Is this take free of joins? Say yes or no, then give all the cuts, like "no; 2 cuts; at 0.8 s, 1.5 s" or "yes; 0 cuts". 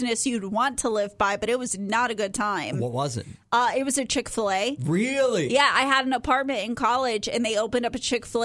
yes; 0 cuts